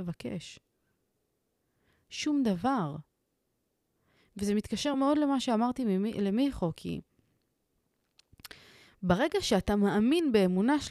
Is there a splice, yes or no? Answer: no